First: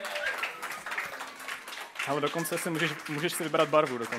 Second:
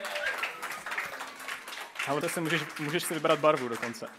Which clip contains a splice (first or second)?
second